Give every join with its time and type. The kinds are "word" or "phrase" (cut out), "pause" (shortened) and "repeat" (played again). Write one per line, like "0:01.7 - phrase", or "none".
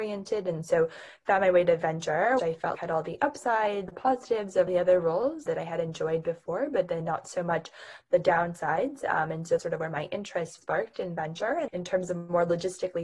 0:02.4 - word
0:02.8 - word
0:03.9 - word
0:04.7 - word
0:05.5 - word
0:09.6 - word
0:10.6 - word
0:11.7 - word